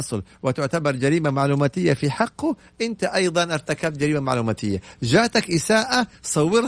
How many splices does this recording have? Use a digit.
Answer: 0